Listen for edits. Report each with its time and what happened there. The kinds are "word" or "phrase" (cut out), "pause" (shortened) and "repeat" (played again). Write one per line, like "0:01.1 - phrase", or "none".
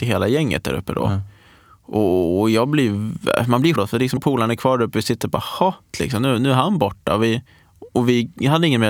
0:03.8 - word
0:04.2 - word
0:05.9 - phrase

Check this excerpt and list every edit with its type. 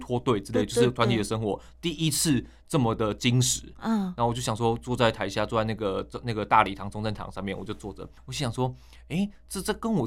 0:08.2 - pause

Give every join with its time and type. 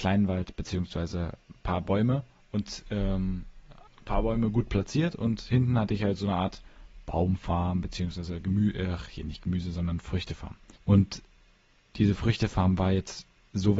0:03.9 - pause
0:10.8 - pause

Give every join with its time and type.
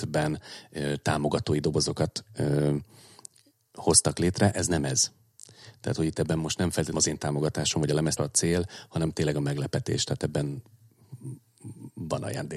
0:06.9 - word
0:08.2 - word

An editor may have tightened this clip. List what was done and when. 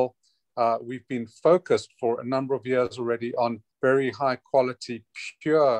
0:03.7 - pause

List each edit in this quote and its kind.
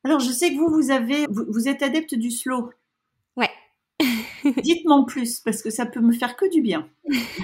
0:01.3 - word

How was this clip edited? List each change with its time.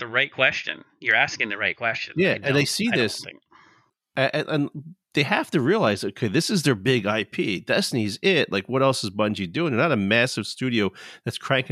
none

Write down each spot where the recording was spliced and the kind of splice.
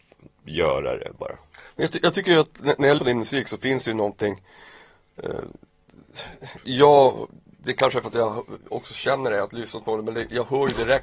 0:03.0 - word
0:06.6 - word

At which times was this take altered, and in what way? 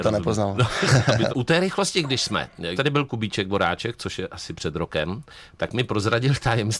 0:01.3 - word
0:02.8 - word

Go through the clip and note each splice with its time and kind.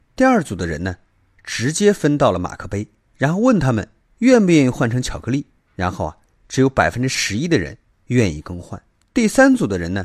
none

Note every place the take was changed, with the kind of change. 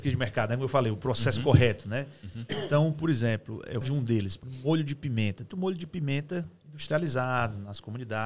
0:03.8 - phrase
0:05.5 - word

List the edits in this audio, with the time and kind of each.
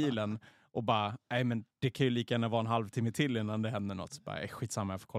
0:01.7 - pause

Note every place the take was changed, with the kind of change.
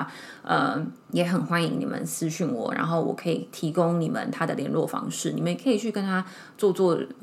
0:01.0 - pause

